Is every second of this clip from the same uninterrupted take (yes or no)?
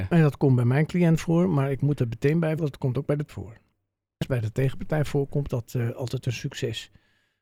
no